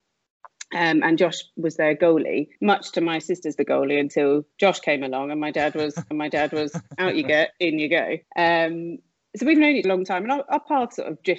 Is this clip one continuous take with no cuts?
no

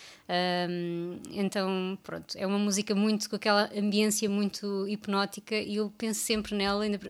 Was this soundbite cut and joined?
no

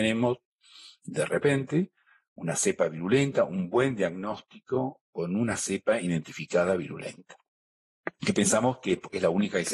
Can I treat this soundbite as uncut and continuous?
yes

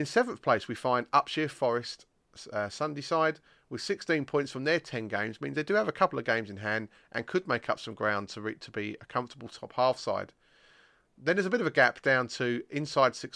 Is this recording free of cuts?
yes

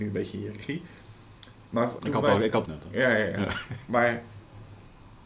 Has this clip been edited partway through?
yes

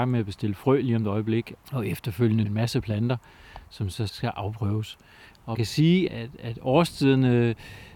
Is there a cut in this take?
yes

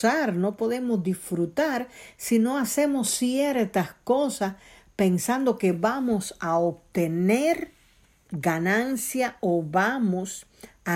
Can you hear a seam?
no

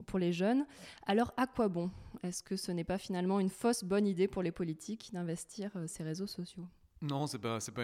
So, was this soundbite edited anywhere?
no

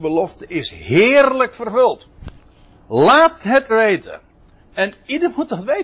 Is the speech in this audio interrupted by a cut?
yes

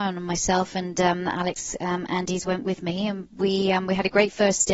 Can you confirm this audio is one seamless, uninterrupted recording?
yes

